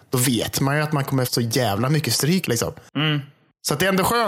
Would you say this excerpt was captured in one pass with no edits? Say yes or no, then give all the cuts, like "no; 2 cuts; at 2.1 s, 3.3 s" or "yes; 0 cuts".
no; 2 cuts; at 1.2 s, 2.4 s